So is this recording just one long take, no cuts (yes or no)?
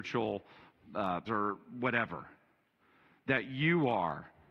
no